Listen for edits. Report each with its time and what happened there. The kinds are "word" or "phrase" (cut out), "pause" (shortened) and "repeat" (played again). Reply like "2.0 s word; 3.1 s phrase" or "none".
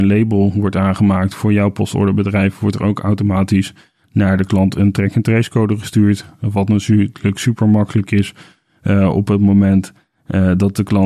none